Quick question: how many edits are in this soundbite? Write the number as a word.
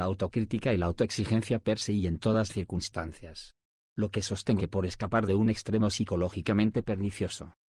two